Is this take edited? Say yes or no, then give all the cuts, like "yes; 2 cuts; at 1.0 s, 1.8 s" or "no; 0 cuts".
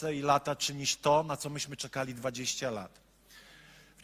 no; 0 cuts